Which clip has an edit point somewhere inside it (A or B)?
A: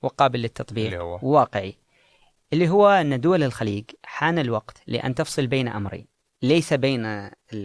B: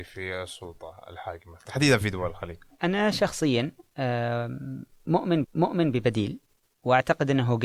B